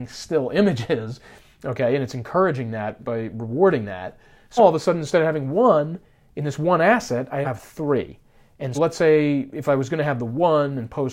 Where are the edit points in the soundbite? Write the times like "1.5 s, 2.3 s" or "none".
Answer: 3.0 s, 4.6 s, 7.4 s, 8.7 s